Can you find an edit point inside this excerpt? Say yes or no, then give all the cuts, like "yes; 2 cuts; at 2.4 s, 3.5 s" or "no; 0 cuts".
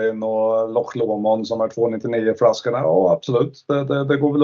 no; 0 cuts